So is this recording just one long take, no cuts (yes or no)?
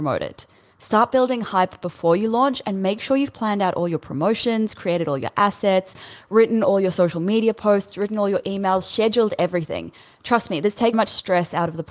no